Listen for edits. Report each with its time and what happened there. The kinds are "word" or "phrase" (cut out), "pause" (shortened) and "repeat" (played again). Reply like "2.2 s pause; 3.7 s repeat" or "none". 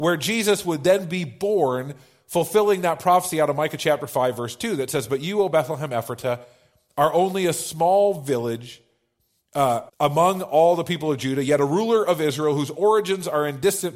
9.9 s pause